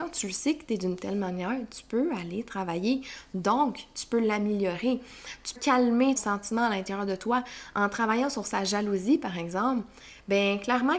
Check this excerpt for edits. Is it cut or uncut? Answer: cut